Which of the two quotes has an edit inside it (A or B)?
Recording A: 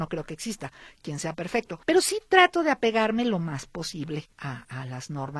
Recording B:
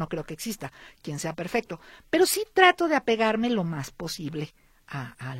A